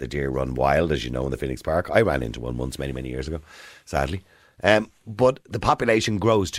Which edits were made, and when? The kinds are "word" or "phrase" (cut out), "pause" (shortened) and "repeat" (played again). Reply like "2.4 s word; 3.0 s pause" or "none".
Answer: none